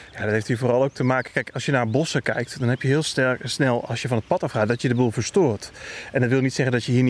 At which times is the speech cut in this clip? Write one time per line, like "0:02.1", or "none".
none